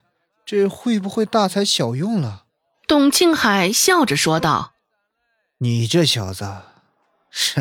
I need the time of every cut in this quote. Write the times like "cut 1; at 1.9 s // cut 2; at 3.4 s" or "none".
cut 1; at 2.5 s